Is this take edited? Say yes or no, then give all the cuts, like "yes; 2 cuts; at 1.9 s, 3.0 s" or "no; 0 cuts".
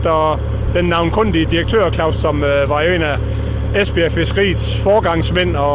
yes; 1 cut; at 2.1 s